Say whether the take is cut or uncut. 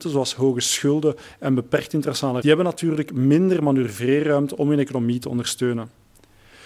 cut